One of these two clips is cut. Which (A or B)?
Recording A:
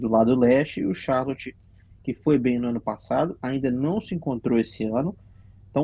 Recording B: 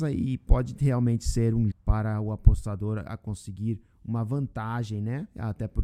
B